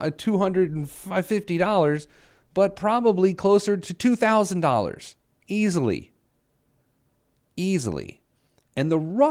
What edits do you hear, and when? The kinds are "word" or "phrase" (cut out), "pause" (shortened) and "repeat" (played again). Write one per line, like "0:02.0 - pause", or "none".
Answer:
none